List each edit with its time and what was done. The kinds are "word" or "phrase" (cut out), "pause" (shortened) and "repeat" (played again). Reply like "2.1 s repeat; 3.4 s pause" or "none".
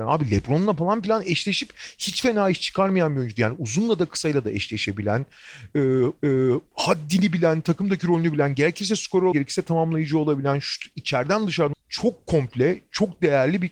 6.2 s repeat; 9.3 s word; 11.7 s word